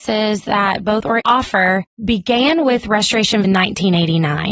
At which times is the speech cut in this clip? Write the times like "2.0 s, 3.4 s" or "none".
1.2 s, 1.9 s, 3.4 s